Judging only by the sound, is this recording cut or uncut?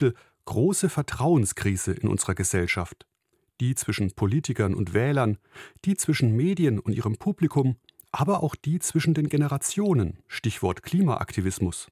uncut